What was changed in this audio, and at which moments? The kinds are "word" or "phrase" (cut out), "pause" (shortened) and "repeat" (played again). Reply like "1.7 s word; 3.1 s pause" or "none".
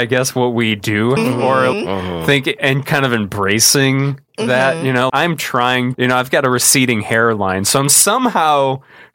1.2 s word; 1.7 s word; 2.8 s word; 5.1 s word; 5.9 s word